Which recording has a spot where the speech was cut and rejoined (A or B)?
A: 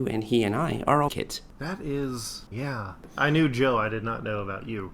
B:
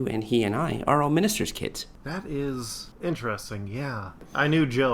A